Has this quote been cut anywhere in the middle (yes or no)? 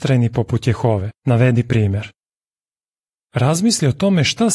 yes